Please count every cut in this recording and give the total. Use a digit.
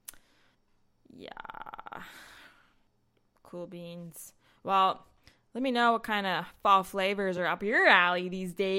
0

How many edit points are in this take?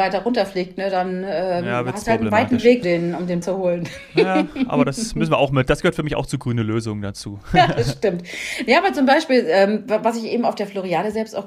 2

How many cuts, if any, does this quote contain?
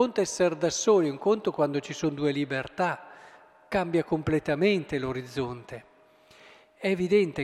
0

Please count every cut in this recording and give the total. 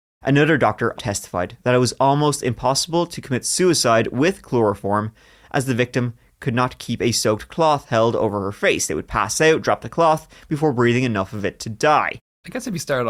1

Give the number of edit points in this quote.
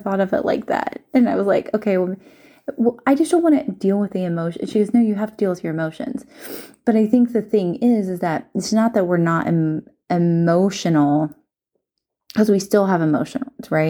0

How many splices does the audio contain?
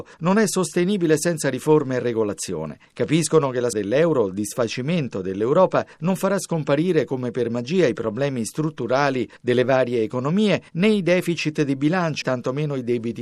2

